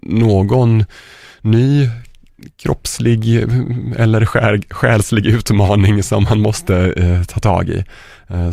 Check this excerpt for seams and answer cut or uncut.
uncut